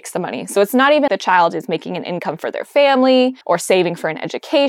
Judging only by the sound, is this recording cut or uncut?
cut